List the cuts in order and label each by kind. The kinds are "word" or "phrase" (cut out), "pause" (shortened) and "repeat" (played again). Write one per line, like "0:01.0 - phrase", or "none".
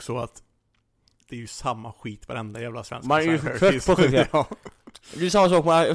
none